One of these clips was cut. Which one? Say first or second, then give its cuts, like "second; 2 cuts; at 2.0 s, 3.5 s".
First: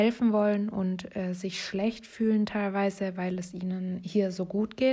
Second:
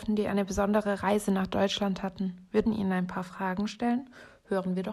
second; 1 cut; at 2.7 s